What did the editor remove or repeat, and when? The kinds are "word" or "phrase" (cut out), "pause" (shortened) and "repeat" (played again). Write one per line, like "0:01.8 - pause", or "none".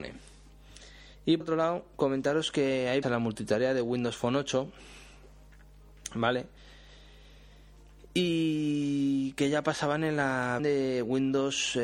0:01.4 - word
0:03.0 - word
0:10.6 - word